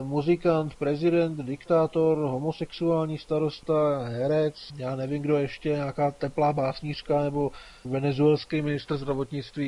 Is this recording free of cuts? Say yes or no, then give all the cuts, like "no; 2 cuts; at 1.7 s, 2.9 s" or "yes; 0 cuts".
no; 2 cuts; at 4.7 s, 7.8 s